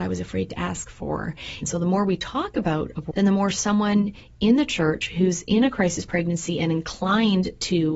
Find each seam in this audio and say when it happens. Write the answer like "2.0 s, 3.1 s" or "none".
3.1 s